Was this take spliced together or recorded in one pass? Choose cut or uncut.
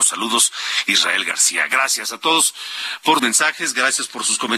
cut